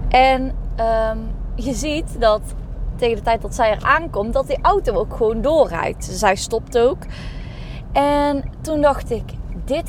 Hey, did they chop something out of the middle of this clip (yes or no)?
no